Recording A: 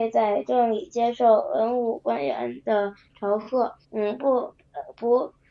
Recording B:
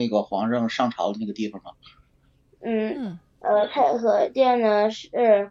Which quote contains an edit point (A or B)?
A